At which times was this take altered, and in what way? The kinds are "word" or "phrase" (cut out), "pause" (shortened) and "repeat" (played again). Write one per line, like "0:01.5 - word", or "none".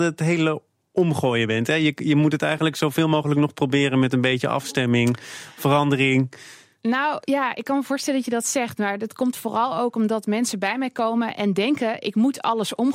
none

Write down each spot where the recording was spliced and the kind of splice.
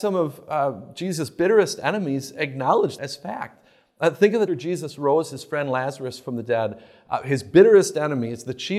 0:03.0 - word
0:04.5 - phrase

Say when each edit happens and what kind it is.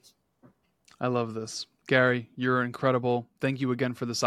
none

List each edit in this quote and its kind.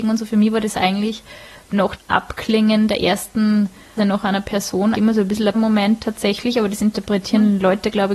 0:02.0 - word
0:04.0 - word
0:04.9 - word
0:05.5 - word

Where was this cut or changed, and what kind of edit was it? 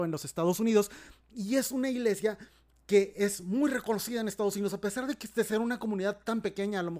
none

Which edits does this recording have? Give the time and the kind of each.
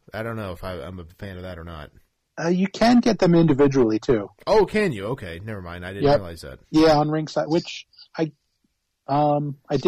0:02.3 - pause
0:06.6 - pause
0:08.1 - pause

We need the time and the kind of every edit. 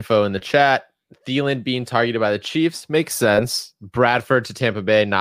none

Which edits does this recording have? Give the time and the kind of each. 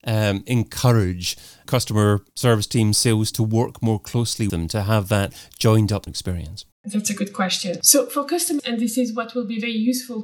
0:02.3 - pause
0:03.3 - word
0:04.5 - word
0:06.1 - word
0:06.7 - pause
0:08.6 - word

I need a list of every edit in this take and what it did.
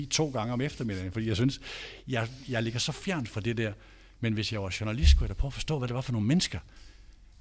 none

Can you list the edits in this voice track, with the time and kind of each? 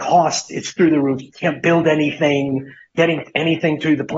none

